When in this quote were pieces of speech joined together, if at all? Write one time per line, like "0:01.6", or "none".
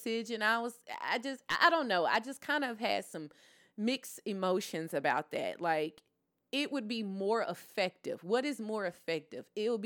none